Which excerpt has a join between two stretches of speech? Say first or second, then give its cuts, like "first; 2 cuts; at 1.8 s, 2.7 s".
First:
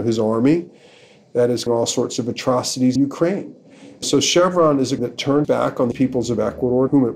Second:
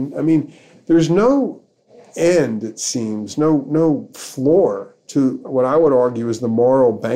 first; 6 cuts; at 1.7 s, 3.0 s, 4.0 s, 5.0 s, 5.4 s, 5.9 s